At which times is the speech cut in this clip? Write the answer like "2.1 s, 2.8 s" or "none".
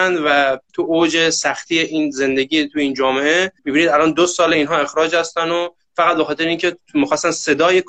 3.6 s